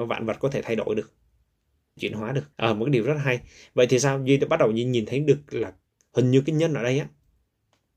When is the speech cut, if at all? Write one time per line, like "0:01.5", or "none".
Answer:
0:02.0
0:02.5
0:06.0